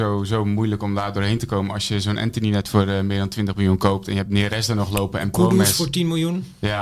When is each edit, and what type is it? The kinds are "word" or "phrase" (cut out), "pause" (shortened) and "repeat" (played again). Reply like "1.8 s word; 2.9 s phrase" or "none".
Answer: none